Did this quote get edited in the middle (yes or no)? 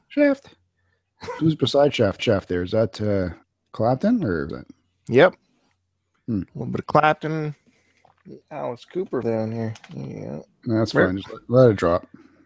yes